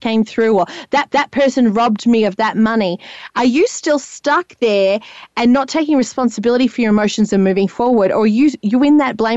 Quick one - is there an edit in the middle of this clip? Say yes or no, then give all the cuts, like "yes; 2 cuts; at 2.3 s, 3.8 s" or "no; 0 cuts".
yes; 1 cut; at 1.1 s